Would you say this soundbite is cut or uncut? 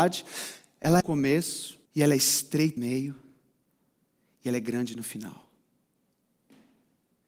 cut